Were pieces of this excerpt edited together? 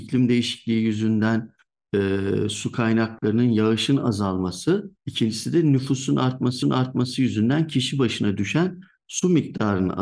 yes; 2 cuts; at 5.0 s, 6.6 s

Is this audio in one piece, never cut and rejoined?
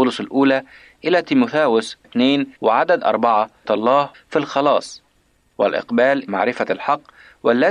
no; 5 cuts; at 2.0 s, 2.6 s, 3.6 s, 4.1 s, 6.3 s

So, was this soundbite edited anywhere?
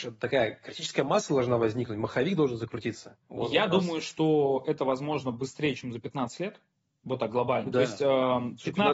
no; 0 cuts

